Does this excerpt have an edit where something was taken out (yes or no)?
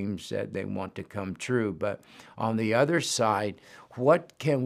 no